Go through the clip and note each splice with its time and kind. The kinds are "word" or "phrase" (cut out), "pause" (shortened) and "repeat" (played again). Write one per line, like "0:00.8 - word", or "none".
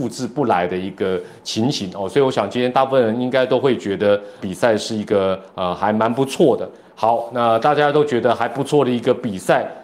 0:04.4 - word